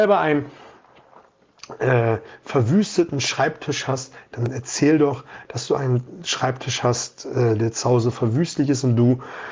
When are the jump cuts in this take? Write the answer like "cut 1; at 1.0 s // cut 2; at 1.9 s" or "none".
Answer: none